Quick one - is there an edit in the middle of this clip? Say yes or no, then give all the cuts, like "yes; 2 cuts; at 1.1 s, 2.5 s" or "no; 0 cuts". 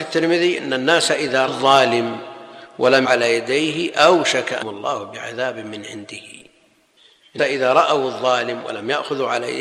yes; 4 cuts; at 1.5 s, 3.0 s, 4.6 s, 7.4 s